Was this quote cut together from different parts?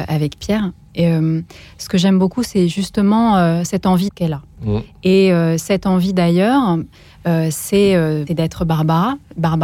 yes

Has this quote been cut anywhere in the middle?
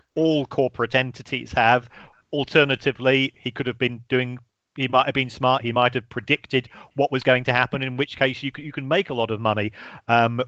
no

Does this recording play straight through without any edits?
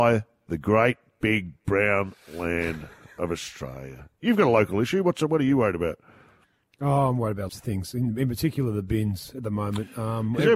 no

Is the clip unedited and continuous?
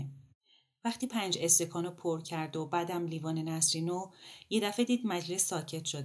yes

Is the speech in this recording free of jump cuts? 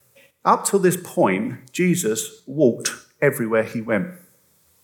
yes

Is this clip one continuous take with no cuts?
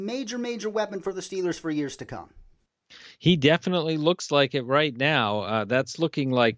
yes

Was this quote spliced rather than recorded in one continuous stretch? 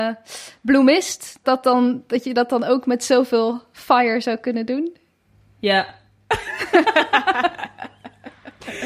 yes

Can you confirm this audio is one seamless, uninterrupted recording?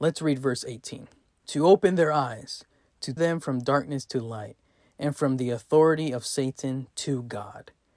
no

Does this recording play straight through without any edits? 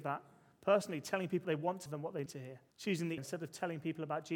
no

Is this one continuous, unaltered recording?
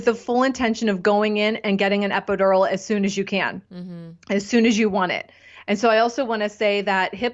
yes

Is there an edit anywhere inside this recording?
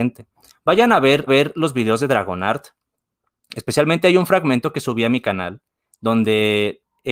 yes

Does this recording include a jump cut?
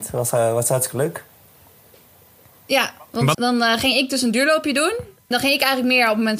yes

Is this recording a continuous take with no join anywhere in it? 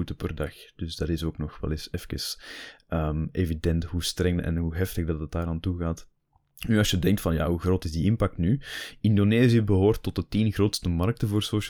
yes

